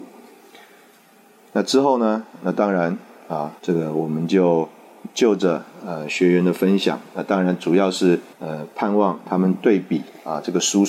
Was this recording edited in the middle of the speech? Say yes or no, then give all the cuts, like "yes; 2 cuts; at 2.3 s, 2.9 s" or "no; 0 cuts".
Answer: yes; 2 cuts; at 3.6 s, 8.3 s